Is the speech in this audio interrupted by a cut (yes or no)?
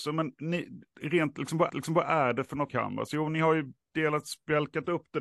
yes